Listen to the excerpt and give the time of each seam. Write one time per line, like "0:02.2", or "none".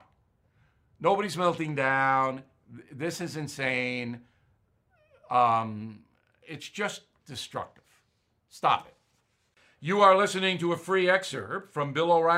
none